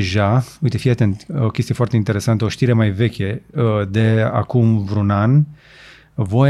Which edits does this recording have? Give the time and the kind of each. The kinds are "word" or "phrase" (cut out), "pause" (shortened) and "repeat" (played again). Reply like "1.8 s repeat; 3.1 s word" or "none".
none